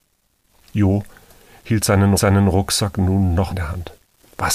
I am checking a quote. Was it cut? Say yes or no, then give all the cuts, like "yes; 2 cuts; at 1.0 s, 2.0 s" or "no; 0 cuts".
yes; 2 cuts; at 2.2 s, 3.5 s